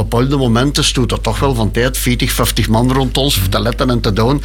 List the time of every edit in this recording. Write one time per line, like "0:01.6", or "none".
none